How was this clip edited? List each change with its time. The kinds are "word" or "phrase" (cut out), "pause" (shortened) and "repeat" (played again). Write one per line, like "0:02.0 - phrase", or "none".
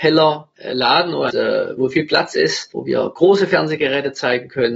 0:01.3 - phrase